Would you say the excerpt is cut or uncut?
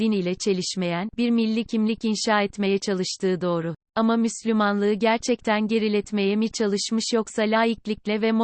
cut